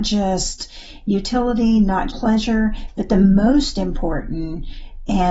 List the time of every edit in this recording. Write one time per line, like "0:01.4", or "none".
0:02.1